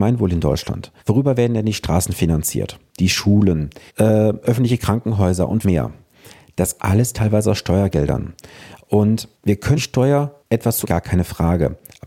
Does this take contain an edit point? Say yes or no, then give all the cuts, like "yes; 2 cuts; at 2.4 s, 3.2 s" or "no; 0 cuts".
yes; 9 cuts; at 1.0 s, 2.9 s, 3.9 s, 5.6 s, 6.8 s, 9.3 s, 9.8 s, 10.4 s, 10.8 s